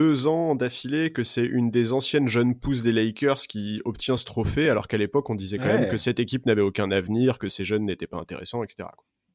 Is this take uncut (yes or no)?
yes